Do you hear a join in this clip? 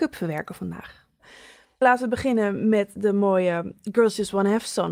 no; 0 cuts

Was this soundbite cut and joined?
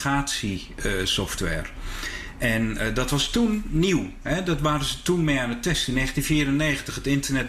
no; 0 cuts

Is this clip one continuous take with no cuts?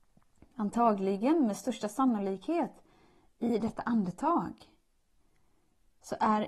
yes; 0 cuts

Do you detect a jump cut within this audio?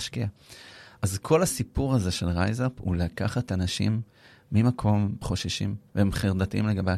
yes; 2 cuts; at 5.2 s, 5.9 s

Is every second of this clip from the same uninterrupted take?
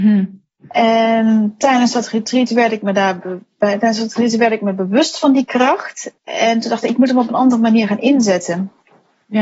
no; 1 cut; at 6.2 s

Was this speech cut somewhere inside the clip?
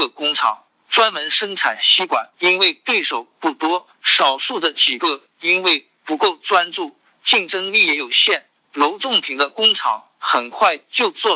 yes; 2 cuts; at 2.3 s, 3.9 s

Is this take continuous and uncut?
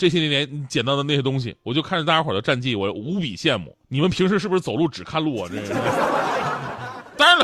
no; 1 cut; at 3.8 s

